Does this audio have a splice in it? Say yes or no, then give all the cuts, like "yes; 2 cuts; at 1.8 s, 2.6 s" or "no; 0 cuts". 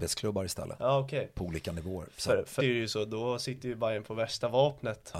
yes; 1 cut; at 2.6 s